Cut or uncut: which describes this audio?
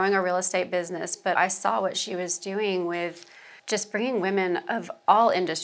cut